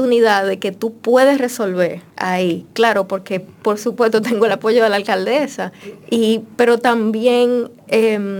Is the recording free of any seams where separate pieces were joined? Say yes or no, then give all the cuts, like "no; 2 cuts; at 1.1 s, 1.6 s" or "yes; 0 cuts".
no; 1 cut; at 2.1 s